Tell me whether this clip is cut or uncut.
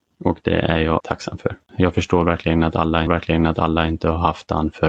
cut